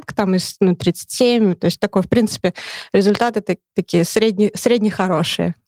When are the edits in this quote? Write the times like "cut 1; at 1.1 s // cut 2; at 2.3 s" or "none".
none

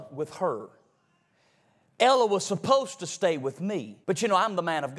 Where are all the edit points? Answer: cut 1; at 4.0 s

